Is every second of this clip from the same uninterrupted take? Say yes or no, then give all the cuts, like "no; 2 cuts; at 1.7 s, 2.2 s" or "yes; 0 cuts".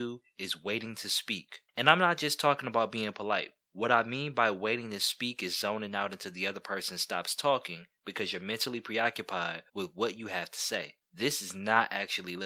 no; 4 cuts; at 1.7 s, 3.6 s, 9.7 s, 11.0 s